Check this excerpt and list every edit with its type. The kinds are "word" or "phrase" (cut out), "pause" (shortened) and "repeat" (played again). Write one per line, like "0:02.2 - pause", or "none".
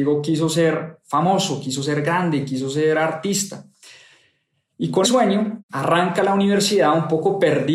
0:05.0 - word